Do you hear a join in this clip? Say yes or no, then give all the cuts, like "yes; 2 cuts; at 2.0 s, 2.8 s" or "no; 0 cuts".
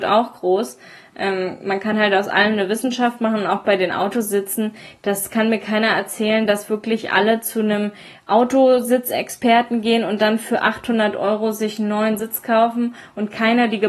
no; 0 cuts